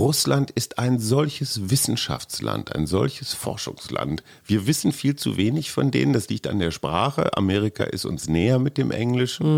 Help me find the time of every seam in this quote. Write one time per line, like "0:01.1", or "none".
none